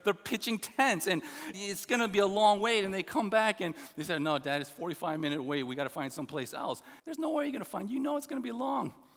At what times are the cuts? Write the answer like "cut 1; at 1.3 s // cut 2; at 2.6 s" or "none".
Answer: cut 1; at 1.5 s // cut 2; at 7.0 s